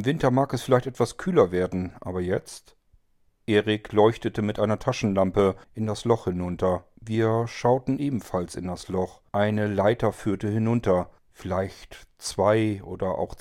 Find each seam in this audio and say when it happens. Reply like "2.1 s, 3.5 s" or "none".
3.1 s, 5.6 s, 7.0 s, 9.3 s, 11.2 s